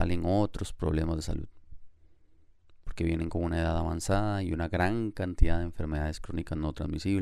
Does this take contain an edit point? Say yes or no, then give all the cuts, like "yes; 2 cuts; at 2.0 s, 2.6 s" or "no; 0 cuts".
no; 0 cuts